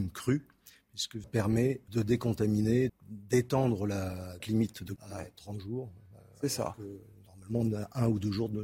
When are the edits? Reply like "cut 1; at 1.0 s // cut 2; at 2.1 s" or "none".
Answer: cut 1; at 1.2 s // cut 2; at 1.9 s // cut 3; at 2.9 s // cut 4; at 4.4 s // cut 5; at 5.0 s